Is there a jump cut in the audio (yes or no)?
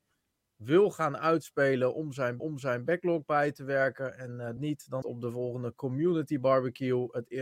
yes